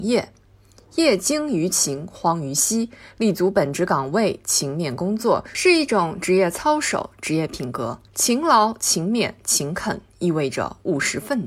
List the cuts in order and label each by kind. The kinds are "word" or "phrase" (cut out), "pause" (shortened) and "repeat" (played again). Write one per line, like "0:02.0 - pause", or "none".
0:08.1 - pause